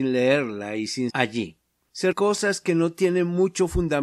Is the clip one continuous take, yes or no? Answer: no